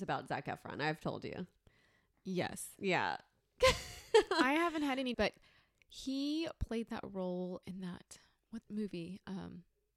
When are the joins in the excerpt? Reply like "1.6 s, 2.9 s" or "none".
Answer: 5.1 s, 7.6 s, 8.6 s